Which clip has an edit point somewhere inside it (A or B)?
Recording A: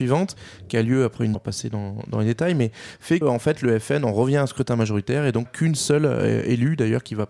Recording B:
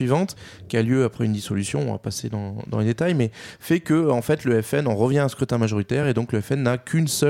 A